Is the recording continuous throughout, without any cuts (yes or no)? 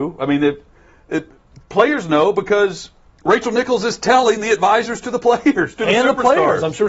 yes